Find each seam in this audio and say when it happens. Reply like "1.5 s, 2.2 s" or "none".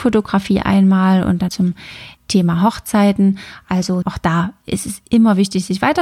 1.5 s, 2.2 s, 4.0 s